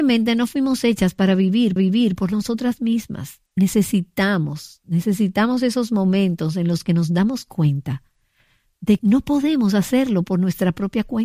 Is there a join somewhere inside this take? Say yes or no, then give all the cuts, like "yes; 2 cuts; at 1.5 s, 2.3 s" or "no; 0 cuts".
yes; 3 cuts; at 1.8 s, 3.5 s, 9.0 s